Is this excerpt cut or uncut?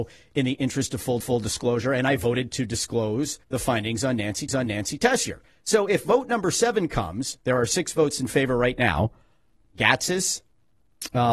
cut